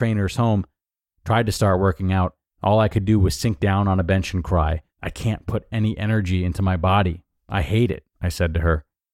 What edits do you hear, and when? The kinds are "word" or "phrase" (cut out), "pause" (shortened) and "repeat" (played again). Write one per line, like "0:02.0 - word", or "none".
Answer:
0:02.5 - pause
0:04.9 - pause
0:08.1 - pause

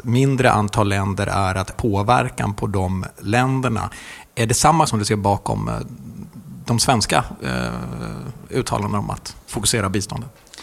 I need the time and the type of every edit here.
0:01.7 - word
0:04.9 - word

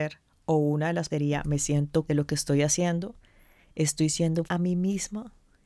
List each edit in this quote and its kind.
0:01.1 - word
0:02.1 - word
0:04.5 - word

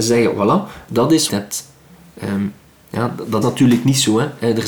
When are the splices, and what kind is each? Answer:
0:01.3 - phrase
0:03.4 - word

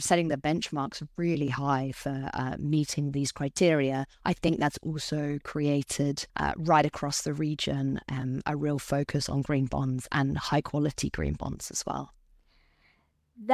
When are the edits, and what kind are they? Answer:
0:04.1 - pause
0:06.3 - pause

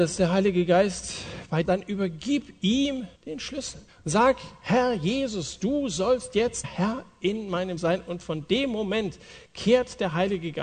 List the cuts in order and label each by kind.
0:01.6 - phrase
0:03.1 - pause
0:03.9 - pause
0:06.6 - word
0:07.8 - word

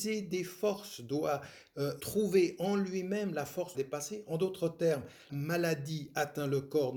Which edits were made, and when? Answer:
0:02.0 - word
0:03.7 - phrase
0:05.3 - word

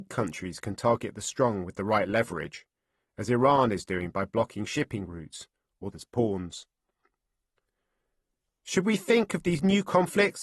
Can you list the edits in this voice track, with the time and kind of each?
0:05.9 - phrase

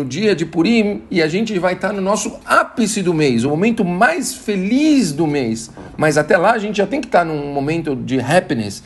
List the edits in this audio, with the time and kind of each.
none

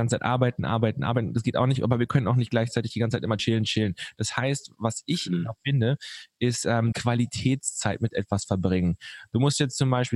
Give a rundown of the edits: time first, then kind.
0:03.4 - word
0:06.9 - phrase

